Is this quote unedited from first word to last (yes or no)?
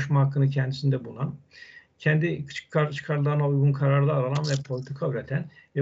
yes